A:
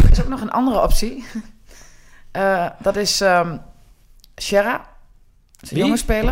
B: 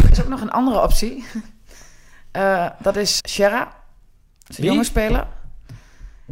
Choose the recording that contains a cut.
B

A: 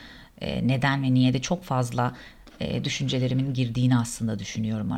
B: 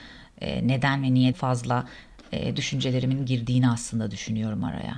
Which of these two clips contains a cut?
B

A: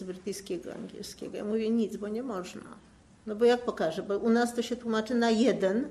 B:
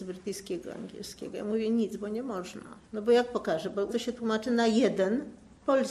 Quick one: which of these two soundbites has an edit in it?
B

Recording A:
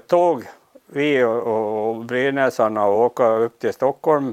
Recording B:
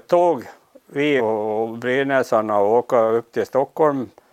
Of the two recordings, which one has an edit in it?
B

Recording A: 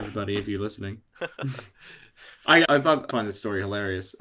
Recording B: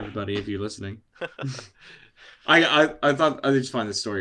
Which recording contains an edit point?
A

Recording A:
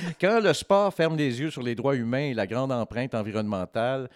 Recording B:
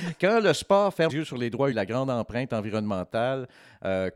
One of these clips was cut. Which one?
B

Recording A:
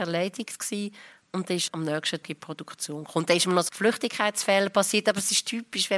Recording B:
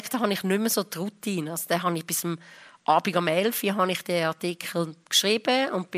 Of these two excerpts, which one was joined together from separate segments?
A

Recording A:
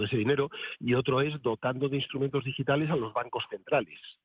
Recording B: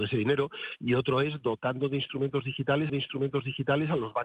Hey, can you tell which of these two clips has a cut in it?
B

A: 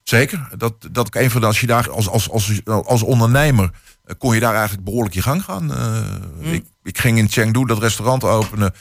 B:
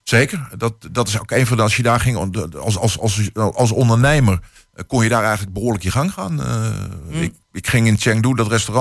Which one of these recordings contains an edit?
A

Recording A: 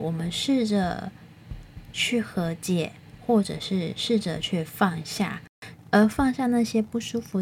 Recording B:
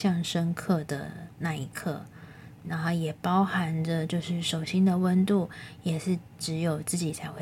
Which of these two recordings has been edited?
B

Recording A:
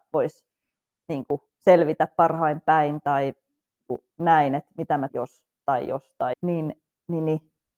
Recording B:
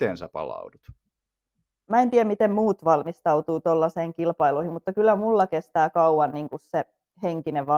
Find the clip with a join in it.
A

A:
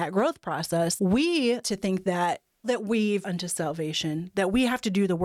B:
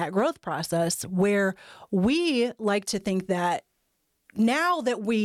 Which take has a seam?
A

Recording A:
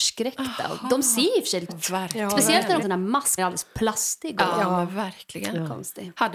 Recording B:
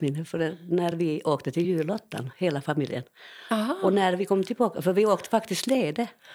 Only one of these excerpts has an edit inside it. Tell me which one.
A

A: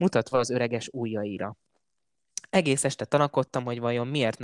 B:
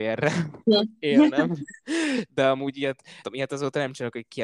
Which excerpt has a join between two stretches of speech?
B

